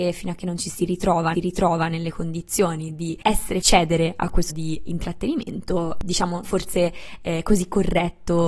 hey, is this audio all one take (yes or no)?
no